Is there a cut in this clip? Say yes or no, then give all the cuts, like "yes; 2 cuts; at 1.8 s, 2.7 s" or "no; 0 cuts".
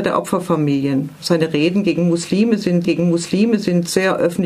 yes; 1 cut; at 2.8 s